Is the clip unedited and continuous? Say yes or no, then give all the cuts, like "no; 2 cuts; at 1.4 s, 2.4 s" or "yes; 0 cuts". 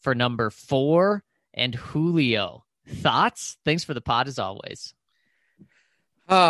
yes; 0 cuts